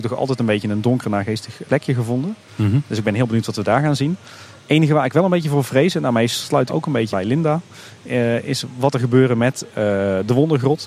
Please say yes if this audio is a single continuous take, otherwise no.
no